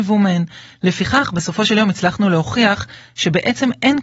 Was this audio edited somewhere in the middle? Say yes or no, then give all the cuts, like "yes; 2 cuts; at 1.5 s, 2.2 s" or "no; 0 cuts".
no; 0 cuts